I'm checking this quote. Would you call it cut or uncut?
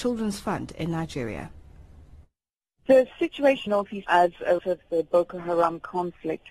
cut